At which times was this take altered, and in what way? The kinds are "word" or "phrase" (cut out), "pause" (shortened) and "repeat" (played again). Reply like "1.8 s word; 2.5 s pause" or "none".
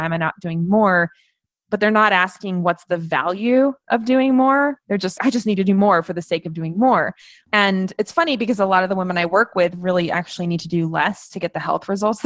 5.2 s word